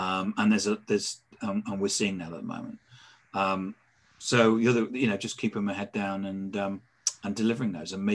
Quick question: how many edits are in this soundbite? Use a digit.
0